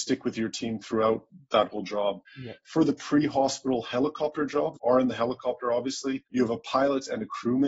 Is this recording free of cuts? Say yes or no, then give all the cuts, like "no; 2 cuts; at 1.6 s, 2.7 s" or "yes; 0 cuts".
no; 3 cuts; at 2.3 s, 4.8 s, 6.3 s